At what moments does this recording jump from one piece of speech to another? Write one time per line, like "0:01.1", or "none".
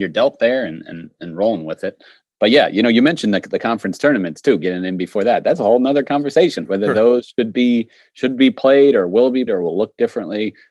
0:06.6
0:09.5